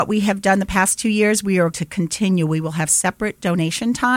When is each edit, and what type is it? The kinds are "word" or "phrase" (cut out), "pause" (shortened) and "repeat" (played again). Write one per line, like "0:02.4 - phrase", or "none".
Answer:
0:01.7 - word